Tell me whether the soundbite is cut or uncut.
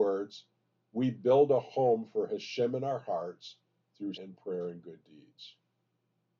cut